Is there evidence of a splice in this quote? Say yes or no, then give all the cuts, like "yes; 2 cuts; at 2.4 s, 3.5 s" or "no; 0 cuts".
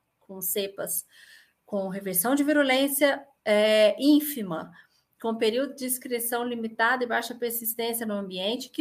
no; 0 cuts